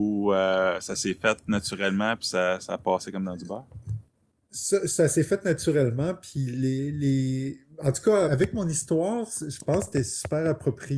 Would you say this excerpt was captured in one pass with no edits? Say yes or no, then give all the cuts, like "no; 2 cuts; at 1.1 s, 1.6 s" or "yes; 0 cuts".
no; 1 cut; at 8.3 s